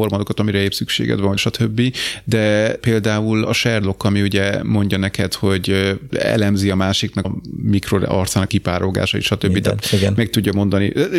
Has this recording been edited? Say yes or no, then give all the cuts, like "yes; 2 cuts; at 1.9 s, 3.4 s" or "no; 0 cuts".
yes; 6 cuts; at 1.4 s, 2.8 s, 3.5 s, 6.1 s, 7.2 s, 8.5 s